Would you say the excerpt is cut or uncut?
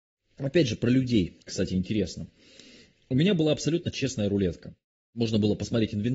uncut